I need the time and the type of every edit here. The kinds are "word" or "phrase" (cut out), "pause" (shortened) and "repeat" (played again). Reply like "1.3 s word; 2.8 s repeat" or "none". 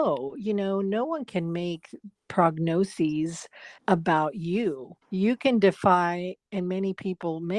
3.8 s pause; 5.0 s pause; 6.4 s pause